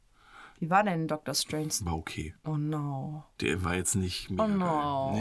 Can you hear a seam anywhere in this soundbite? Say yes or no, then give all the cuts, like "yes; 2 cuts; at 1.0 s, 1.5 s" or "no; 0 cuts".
no; 0 cuts